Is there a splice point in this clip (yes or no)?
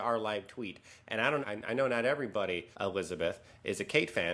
yes